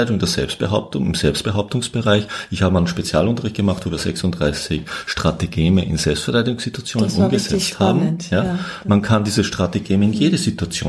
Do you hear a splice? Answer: no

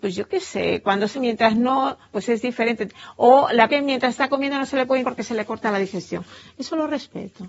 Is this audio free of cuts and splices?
no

